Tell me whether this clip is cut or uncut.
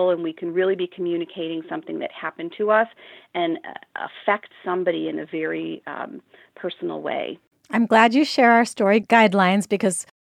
uncut